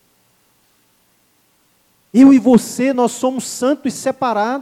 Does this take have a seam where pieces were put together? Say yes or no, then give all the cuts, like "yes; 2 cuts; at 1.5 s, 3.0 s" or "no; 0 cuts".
no; 0 cuts